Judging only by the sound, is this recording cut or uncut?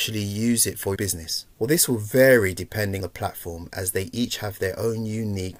cut